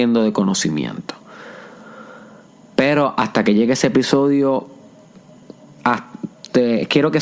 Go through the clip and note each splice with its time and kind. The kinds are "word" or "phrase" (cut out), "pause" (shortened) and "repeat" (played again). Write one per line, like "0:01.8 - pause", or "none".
none